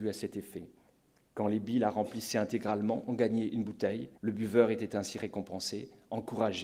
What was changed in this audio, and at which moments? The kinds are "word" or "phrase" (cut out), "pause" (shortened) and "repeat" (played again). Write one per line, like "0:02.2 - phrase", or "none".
0:04.2 - pause